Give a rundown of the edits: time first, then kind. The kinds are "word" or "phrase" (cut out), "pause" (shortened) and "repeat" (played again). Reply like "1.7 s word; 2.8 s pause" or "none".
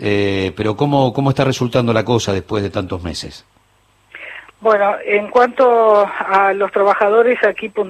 none